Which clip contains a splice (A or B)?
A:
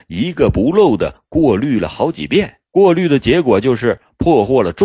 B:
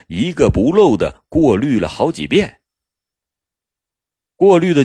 A